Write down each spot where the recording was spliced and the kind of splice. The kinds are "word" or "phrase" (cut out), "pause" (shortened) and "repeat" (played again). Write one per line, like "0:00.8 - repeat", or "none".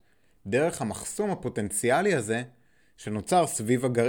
none